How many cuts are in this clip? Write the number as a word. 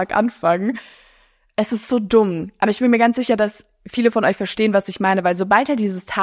zero